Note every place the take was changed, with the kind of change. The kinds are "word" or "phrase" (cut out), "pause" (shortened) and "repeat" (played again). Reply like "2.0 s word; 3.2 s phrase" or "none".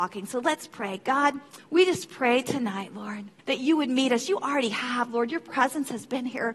1.6 s pause; 3.4 s pause